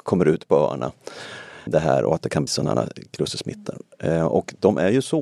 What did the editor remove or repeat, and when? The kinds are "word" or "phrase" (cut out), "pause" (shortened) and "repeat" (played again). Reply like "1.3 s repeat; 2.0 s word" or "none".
1.7 s word; 2.5 s word